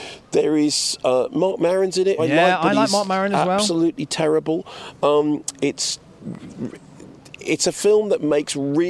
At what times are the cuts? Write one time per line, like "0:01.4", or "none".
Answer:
0:02.2